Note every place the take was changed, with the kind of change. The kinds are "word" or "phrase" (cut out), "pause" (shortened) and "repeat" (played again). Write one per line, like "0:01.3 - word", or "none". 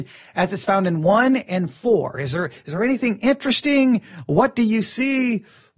none